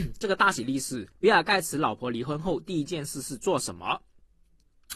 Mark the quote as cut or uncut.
cut